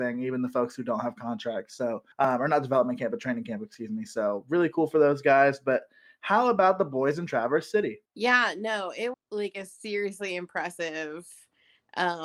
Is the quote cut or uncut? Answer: cut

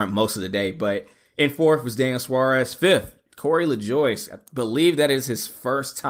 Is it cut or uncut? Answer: uncut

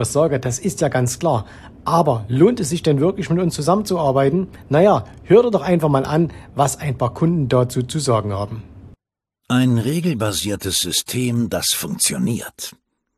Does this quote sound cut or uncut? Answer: uncut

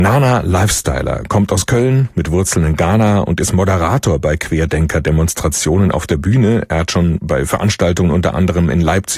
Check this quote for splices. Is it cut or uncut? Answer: uncut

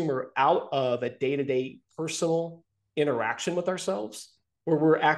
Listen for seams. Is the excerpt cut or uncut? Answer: uncut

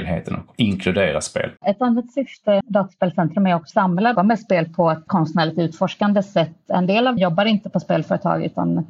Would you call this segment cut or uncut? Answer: cut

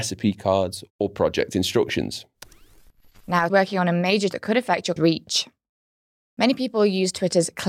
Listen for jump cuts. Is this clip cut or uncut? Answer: cut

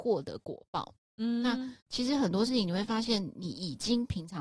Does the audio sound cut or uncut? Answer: cut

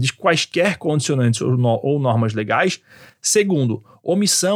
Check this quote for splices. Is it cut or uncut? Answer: uncut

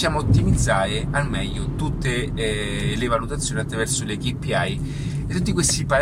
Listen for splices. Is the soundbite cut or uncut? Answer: uncut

